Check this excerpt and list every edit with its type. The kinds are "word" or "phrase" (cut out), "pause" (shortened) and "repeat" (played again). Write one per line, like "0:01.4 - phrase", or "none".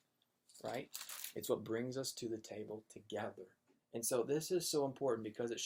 0:03.8 - pause